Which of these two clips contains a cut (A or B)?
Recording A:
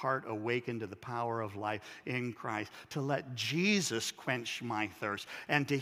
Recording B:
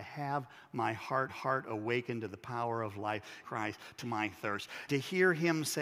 B